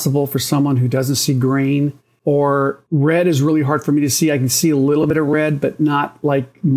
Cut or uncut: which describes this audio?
uncut